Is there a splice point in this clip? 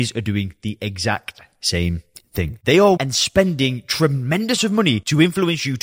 yes; 2 cuts; at 3.0 s, 4.6 s

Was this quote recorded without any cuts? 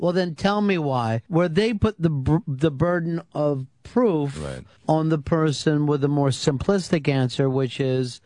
no; 2 cuts; at 1.2 s, 4.8 s

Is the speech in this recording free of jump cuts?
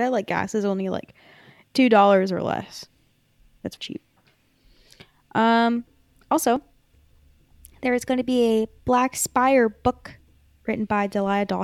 no; 1 cut; at 3.8 s

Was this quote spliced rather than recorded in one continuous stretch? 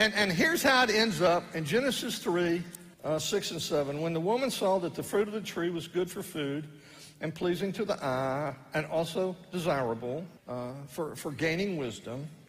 yes; 2 cuts; at 2.9 s, 10.4 s

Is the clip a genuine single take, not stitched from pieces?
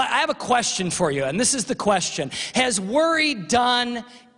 yes; 0 cuts

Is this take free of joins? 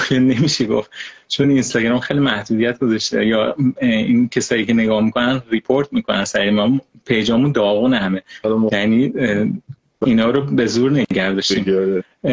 yes; 0 cuts

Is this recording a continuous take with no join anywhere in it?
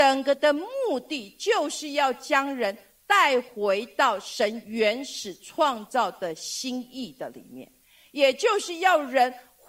yes; 0 cuts

